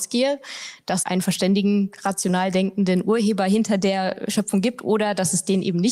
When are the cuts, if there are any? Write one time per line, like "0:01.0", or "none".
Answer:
0:01.0